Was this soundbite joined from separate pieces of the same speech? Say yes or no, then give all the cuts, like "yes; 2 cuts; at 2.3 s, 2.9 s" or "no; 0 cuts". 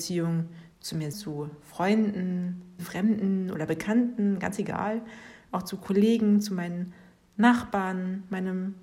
yes; 2 cuts; at 1.1 s, 2.8 s